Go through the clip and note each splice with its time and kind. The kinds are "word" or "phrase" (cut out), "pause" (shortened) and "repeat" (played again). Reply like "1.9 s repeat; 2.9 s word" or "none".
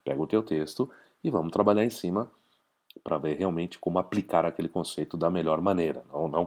none